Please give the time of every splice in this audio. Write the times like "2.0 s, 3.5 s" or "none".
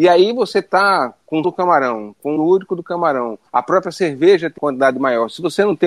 1.4 s, 2.4 s, 3.5 s, 4.6 s